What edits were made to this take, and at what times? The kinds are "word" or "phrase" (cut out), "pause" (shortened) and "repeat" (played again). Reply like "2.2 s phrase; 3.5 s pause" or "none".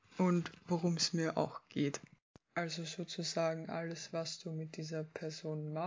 none

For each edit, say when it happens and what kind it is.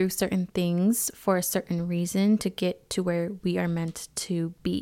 none

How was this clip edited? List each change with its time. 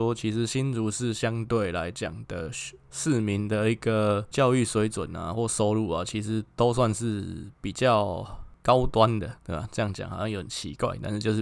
9.4 s pause

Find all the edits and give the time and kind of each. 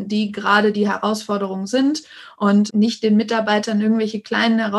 2.7 s word

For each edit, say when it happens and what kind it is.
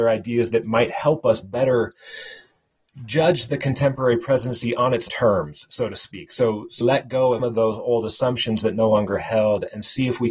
5.1 s word; 6.8 s word; 7.4 s word

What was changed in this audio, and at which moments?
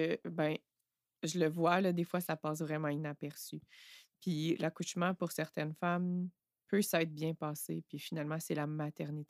none

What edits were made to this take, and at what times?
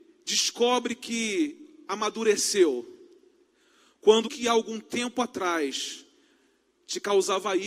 4.2 s word

